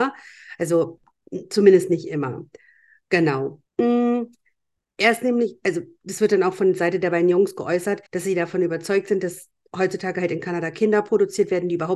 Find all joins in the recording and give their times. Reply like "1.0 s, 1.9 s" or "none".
3.7 s, 8.1 s